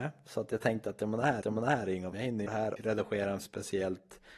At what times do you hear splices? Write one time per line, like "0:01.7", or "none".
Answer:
0:01.4
0:02.1
0:02.5
0:02.8
0:03.4